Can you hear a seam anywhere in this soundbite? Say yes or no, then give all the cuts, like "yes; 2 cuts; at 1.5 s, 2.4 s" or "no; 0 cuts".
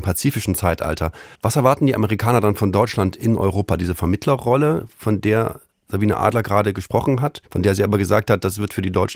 yes; 2 cuts; at 1.3 s, 7.5 s